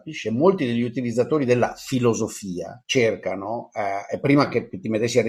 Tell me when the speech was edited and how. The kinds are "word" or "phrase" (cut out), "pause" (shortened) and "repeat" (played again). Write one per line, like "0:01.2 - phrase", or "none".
0:02.8 - pause

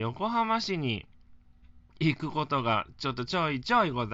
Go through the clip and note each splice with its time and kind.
0:01.9 - pause

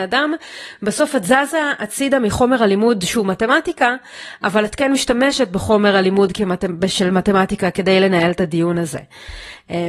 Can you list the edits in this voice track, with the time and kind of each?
none

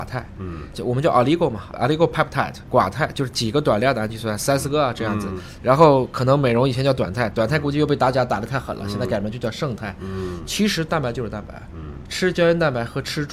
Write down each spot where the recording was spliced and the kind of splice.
none

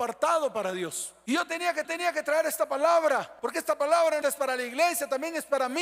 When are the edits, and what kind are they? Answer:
0:01.8 - repeat
0:04.2 - phrase

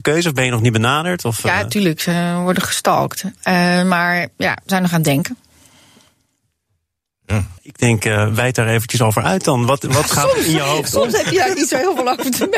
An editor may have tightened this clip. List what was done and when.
0:03.4 - pause
0:07.6 - pause

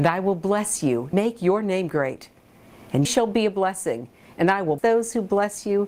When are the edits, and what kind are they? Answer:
0:01.1 - word
0:03.0 - word
0:04.8 - word

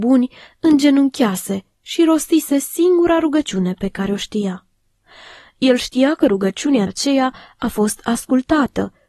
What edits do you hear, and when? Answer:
0:06.9 - phrase

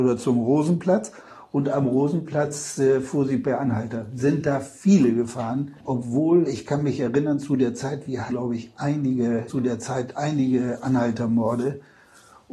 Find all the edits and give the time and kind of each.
0:05.8 - pause
0:08.3 - word
0:09.5 - phrase

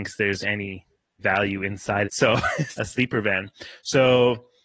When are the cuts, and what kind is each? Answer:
0:01.2 - word
0:02.0 - phrase
0:02.8 - word

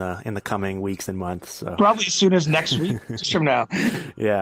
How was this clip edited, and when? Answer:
0:03.2 - word

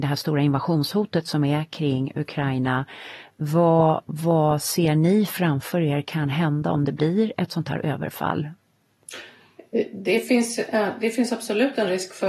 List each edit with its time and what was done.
none

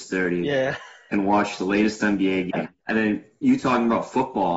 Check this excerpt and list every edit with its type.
0:02.8 - pause

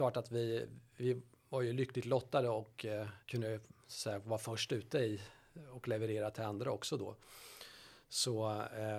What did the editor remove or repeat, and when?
0:03.2 - pause

